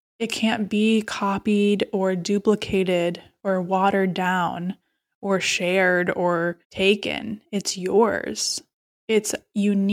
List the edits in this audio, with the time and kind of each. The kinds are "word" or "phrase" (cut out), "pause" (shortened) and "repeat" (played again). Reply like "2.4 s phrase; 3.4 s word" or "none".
6.6 s pause